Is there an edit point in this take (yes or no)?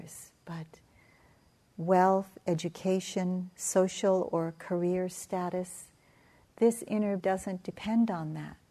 yes